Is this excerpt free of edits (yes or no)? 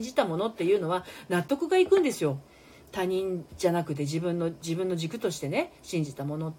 no